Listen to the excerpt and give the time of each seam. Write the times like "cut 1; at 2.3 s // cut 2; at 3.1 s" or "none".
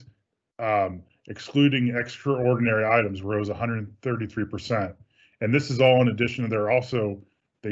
none